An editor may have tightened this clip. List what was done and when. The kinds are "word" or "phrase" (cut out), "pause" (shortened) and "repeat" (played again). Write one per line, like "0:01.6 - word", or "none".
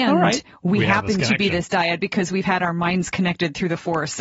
none